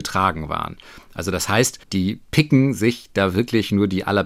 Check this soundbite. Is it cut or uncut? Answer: cut